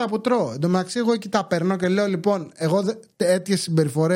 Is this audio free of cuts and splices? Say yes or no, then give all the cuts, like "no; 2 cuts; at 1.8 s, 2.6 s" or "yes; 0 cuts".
yes; 0 cuts